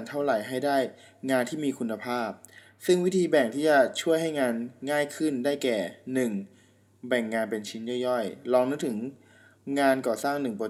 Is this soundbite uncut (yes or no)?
yes